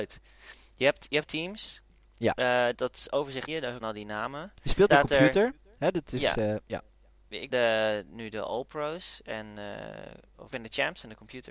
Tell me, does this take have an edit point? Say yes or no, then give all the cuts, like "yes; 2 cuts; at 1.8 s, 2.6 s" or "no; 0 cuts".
yes; 7 cuts; at 1.2 s, 2.7 s, 3.5 s, 3.8 s, 4.9 s, 7.5 s, 10.5 s